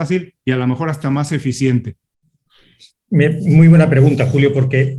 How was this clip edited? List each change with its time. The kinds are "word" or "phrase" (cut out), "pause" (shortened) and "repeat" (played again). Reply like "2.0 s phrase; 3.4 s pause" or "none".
none